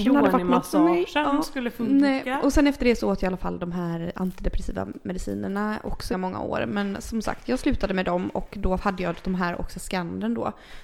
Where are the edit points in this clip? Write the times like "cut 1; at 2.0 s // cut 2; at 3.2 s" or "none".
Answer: cut 1; at 6.1 s